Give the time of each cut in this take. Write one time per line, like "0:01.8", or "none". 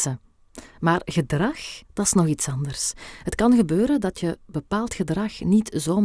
0:01.8